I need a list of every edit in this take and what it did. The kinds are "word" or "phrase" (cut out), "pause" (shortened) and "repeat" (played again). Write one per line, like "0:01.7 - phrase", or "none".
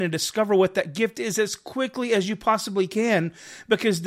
none